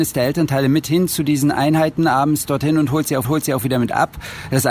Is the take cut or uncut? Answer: cut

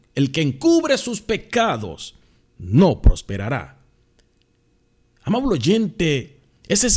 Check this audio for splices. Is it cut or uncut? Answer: uncut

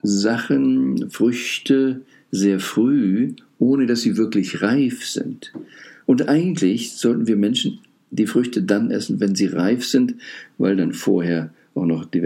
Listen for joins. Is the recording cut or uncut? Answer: uncut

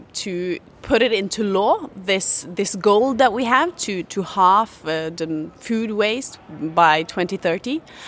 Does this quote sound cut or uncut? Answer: uncut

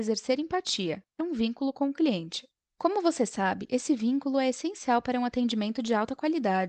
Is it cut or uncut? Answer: cut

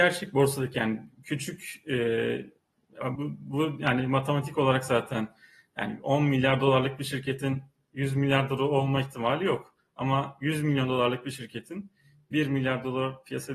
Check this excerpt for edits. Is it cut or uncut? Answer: cut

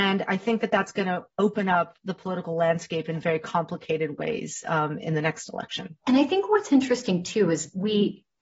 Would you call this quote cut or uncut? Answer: cut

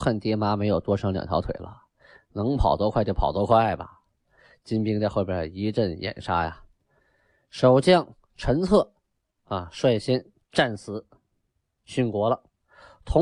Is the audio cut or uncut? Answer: uncut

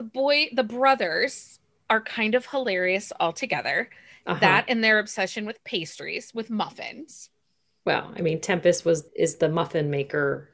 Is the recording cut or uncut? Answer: cut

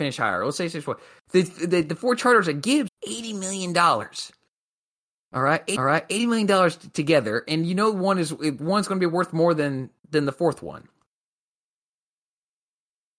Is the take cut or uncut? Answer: cut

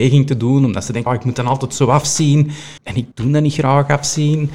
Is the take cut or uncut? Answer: cut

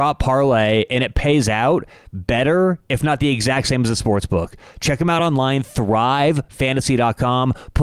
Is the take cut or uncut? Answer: uncut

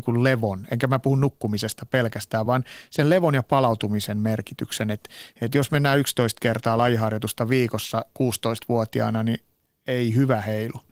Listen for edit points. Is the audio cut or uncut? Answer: uncut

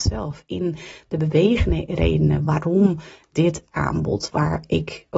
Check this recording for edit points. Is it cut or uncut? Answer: uncut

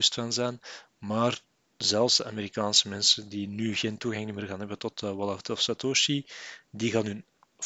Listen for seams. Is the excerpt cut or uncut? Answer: uncut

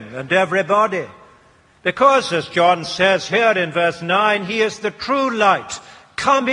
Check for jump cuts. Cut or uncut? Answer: uncut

